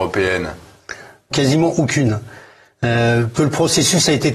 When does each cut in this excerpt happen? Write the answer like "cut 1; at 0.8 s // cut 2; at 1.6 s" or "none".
cut 1; at 1.3 s // cut 2; at 3.4 s